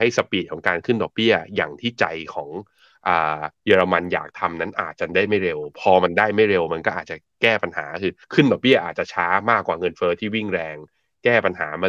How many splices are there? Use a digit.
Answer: 2